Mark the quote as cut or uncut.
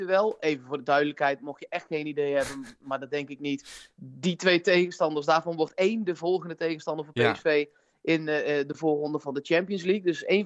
uncut